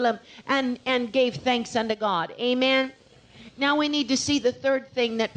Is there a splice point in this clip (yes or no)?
no